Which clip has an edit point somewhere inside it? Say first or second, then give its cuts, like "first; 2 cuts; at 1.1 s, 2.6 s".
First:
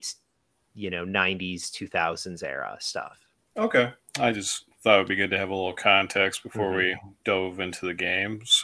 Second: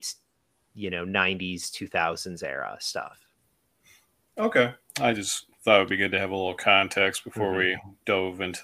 first; 1 cut; at 3.4 s